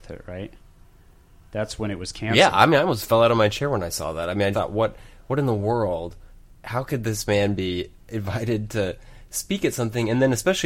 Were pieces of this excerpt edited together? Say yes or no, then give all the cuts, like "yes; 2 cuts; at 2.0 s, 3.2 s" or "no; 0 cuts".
yes; 1 cut; at 4.5 s